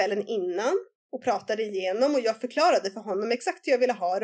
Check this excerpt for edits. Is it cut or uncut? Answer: uncut